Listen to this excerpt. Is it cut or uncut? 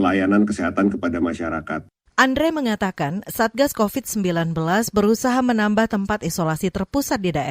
cut